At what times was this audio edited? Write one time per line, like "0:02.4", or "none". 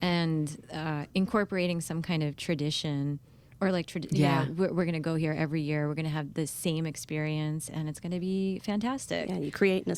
none